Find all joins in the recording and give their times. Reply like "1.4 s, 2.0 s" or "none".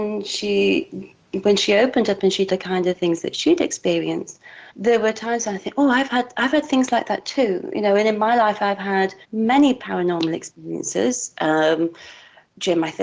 2.5 s, 4.7 s, 9.2 s

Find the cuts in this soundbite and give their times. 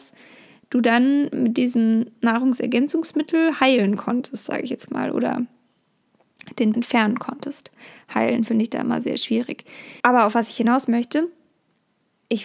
6.7 s, 9.0 s, 10.0 s

